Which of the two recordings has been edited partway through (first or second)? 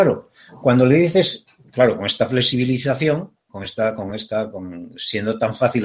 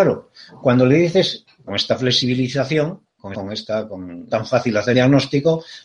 second